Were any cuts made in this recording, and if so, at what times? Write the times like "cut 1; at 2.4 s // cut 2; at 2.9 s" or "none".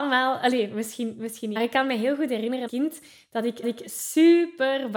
cut 1; at 1.6 s // cut 2; at 2.7 s // cut 3; at 3.6 s